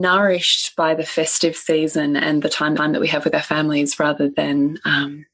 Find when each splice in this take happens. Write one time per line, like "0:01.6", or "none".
0:02.8